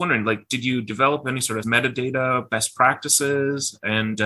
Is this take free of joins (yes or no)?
no